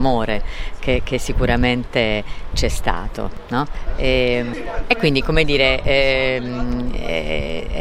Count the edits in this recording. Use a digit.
0